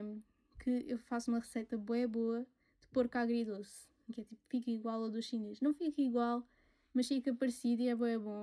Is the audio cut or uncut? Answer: uncut